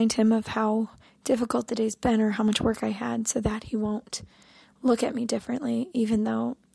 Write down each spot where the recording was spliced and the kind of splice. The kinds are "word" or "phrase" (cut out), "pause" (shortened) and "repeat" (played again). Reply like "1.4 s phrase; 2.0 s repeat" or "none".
none

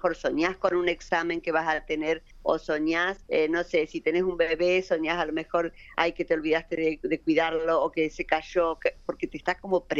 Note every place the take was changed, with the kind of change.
2.3 s pause; 3.2 s pause

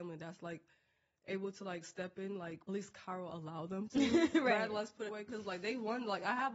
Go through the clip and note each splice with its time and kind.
2.7 s phrase; 5.1 s phrase

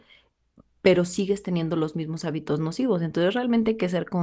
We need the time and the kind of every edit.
none

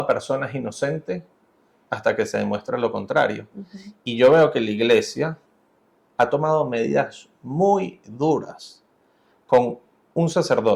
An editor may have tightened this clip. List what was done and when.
none

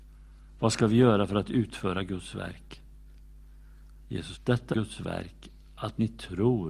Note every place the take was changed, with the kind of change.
4.3 s word; 4.7 s word

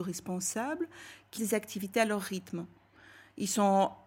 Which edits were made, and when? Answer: 1.4 s word

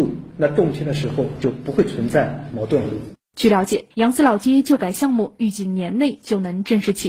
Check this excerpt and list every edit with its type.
3.9 s pause

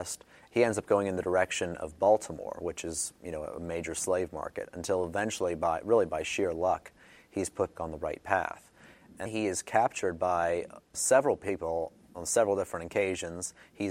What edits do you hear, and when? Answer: 7.7 s word; 9.3 s word; 10.9 s word

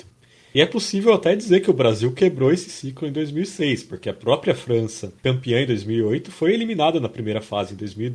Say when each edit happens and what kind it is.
5.2 s pause

